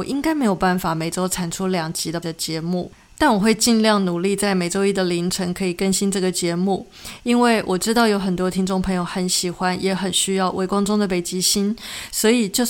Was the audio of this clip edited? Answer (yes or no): yes